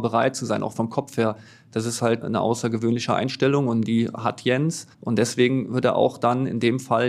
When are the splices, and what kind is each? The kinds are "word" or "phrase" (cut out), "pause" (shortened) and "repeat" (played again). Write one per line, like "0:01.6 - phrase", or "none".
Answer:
0:02.2 - word
0:04.9 - pause